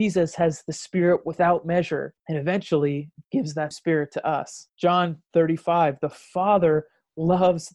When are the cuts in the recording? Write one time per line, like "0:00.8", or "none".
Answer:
0:02.2
0:03.7
0:04.7